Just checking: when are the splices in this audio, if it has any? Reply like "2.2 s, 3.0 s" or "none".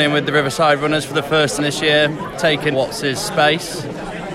1.6 s, 2.7 s